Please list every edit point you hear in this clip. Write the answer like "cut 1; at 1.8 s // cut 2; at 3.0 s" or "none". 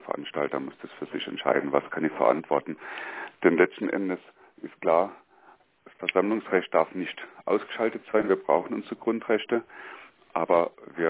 none